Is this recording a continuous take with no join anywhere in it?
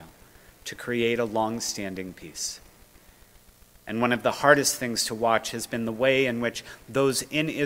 yes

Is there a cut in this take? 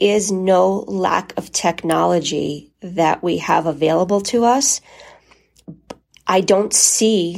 no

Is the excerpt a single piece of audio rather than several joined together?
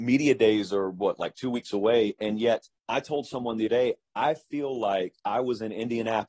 no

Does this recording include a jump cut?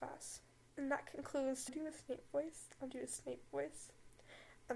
yes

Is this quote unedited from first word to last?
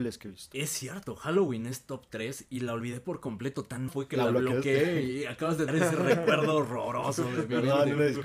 no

